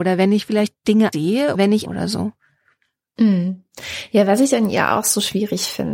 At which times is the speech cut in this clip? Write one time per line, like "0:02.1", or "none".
0:01.1
0:01.5
0:01.8